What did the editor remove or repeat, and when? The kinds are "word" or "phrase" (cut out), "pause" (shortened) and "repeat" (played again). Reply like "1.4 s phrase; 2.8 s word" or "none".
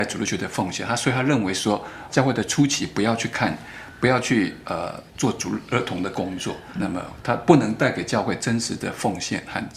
2.1 s word; 6.8 s word